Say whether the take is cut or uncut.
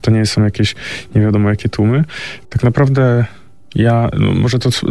cut